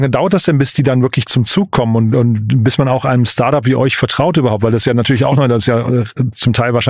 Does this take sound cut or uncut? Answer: uncut